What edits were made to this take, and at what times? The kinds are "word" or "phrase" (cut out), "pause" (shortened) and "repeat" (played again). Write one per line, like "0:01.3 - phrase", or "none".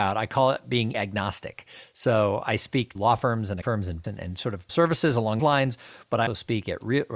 0:00.9 - word
0:03.0 - word
0:03.6 - word
0:04.0 - word
0:04.7 - word
0:05.4 - word
0:06.3 - word